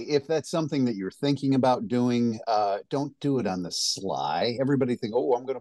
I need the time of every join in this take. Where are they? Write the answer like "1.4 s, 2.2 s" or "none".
none